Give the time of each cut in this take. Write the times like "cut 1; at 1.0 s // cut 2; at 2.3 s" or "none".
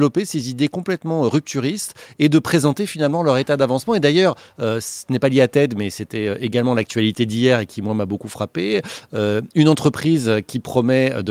none